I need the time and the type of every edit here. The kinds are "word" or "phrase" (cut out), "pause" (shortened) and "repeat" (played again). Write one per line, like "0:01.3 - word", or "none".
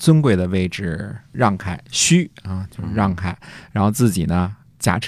0:01.2 - pause